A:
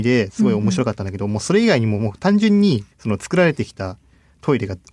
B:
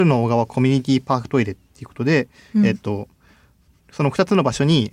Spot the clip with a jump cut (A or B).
A